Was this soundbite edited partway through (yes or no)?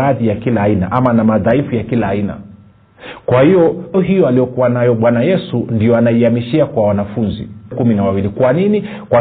yes